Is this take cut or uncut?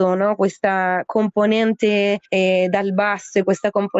cut